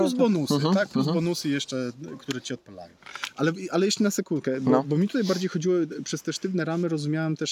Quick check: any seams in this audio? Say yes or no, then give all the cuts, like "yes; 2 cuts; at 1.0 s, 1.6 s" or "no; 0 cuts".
no; 0 cuts